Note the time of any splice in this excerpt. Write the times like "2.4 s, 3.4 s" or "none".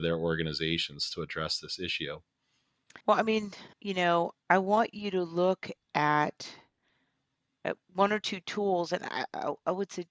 3.0 s, 3.7 s, 4.4 s, 7.8 s